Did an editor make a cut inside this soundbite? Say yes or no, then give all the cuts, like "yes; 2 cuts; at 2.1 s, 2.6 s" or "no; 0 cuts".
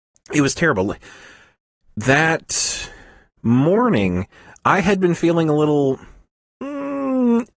no; 0 cuts